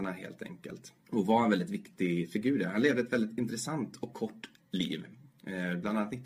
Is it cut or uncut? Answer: cut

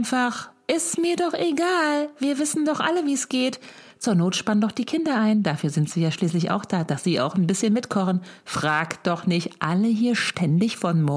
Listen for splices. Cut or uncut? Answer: uncut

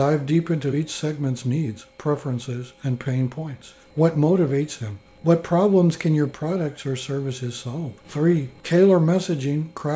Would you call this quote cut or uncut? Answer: cut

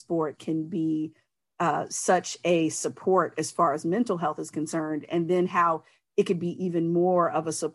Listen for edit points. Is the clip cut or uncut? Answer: uncut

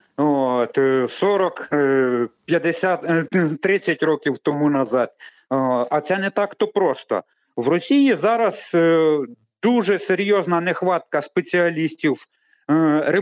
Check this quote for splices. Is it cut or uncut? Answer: uncut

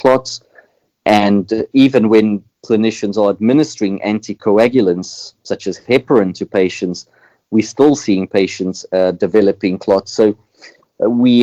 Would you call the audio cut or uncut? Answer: cut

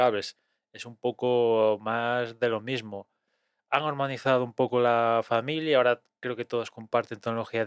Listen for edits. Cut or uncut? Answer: uncut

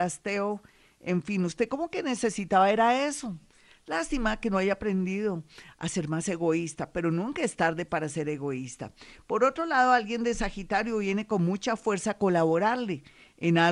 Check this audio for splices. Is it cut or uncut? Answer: uncut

